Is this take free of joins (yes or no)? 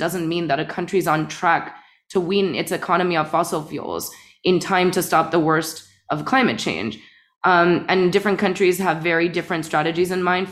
yes